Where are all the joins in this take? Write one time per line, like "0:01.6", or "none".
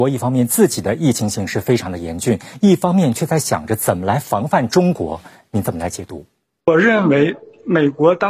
none

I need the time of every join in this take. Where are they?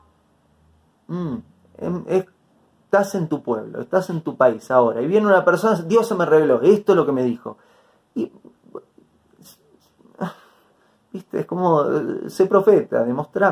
none

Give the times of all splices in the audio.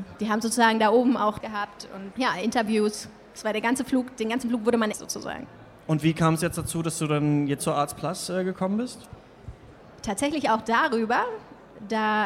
0:01.4
0:02.1
0:04.9
0:07.6

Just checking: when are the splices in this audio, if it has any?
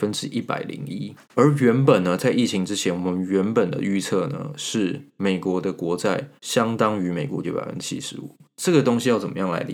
0:01.2
0:06.4
0:07.4

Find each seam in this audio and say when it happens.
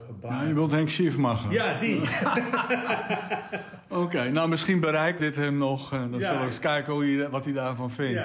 0:05.2

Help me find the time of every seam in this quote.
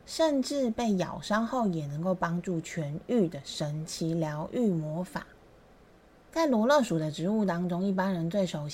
0:05.6

